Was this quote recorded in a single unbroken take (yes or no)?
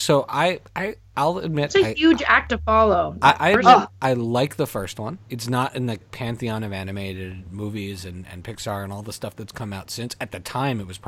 no